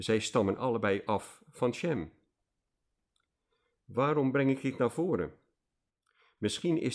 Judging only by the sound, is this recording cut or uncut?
uncut